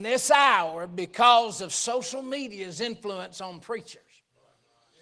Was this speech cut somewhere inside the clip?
no; 0 cuts

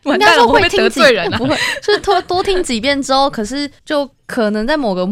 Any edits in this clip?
yes; 1 cut; at 3.8 s

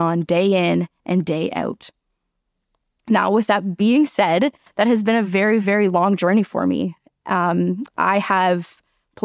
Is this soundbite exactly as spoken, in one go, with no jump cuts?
yes; 0 cuts

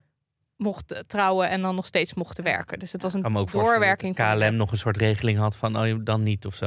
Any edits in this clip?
no; 0 cuts

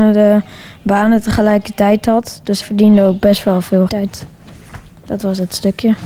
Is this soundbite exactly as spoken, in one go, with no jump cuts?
no; 2 cuts; at 2.6 s, 3.9 s

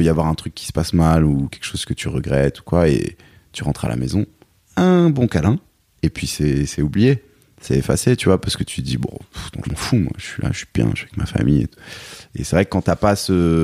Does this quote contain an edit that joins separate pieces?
yes; 1 cut; at 9.6 s

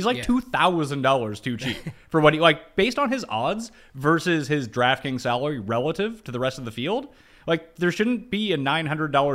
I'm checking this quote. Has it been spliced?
no; 0 cuts

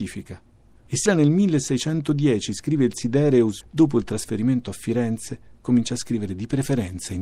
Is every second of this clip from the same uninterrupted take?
no; 2 cuts; at 1.1 s, 3.6 s

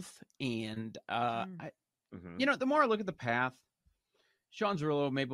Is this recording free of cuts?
yes; 0 cuts

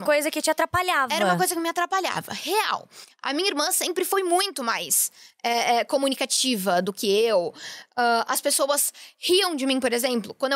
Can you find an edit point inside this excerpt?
no; 0 cuts

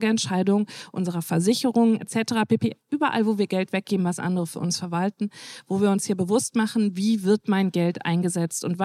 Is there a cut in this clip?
no; 0 cuts

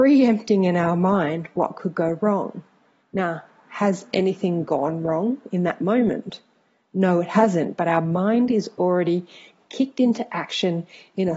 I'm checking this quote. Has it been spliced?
no; 0 cuts

